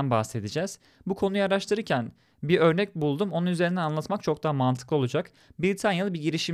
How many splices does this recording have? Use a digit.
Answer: 0